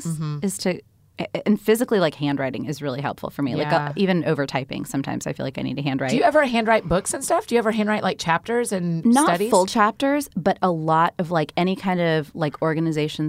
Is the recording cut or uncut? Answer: uncut